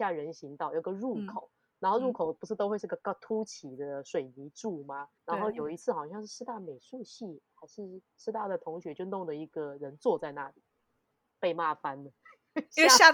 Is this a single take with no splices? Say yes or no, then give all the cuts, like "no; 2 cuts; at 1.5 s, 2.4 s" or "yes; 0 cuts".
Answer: no; 1 cut; at 5.2 s